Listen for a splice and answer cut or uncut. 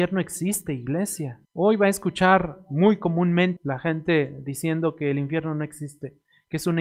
cut